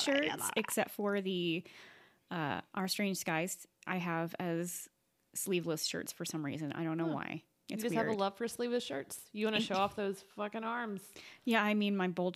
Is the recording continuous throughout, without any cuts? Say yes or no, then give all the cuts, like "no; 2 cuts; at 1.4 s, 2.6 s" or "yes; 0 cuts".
yes; 0 cuts